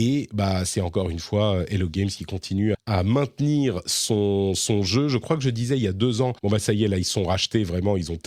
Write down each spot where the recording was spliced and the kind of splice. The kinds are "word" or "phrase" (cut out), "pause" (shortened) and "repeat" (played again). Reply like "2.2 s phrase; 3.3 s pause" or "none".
2.7 s word; 6.4 s pause